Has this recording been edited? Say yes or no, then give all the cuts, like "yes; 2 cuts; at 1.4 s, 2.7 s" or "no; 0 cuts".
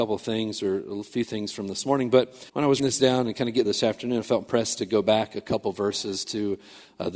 yes; 3 cuts; at 2.5 s, 2.8 s, 3.6 s